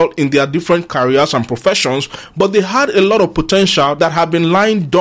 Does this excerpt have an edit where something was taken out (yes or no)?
no